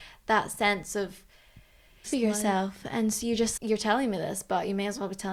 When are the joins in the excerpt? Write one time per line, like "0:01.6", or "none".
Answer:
0:02.0
0:03.6